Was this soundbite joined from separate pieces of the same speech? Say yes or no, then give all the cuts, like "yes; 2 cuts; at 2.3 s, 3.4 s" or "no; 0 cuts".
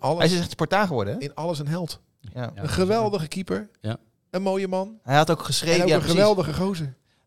no; 0 cuts